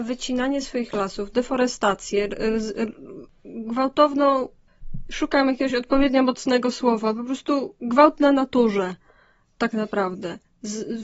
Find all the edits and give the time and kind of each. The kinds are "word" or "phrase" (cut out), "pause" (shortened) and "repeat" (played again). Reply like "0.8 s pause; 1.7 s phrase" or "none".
none